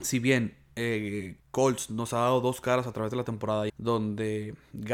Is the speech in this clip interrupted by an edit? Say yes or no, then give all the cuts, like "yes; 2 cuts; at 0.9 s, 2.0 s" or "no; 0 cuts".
yes; 2 cuts; at 1.4 s, 3.7 s